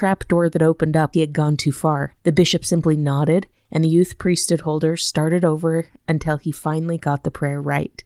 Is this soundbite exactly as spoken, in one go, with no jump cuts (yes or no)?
no